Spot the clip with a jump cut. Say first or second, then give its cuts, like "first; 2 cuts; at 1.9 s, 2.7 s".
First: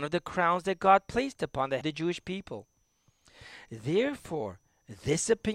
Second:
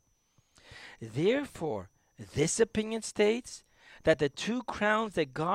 first; 1 cut; at 1.8 s